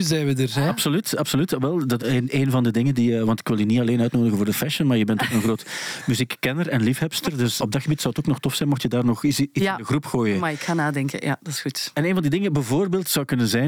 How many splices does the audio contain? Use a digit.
2